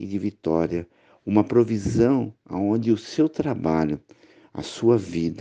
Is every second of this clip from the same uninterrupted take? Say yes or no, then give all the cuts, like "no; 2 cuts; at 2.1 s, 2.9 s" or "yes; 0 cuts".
yes; 0 cuts